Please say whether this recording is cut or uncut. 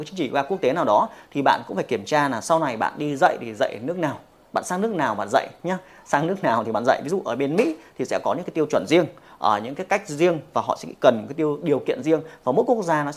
uncut